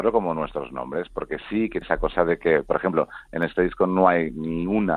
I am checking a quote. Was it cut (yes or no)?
yes